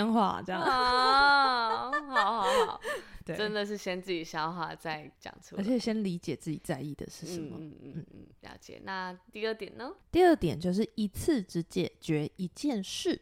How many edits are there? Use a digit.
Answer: 2